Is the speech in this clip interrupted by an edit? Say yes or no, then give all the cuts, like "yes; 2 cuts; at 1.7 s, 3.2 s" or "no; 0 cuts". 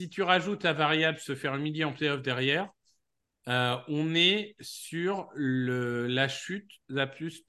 no; 0 cuts